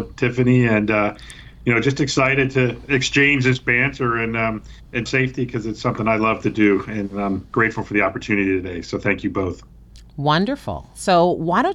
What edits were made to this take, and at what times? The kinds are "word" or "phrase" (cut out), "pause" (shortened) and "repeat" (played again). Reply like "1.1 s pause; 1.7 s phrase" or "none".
5.1 s phrase